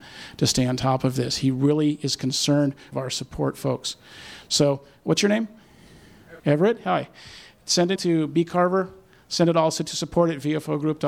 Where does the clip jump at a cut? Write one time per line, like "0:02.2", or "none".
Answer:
0:02.9
0:06.4
0:08.0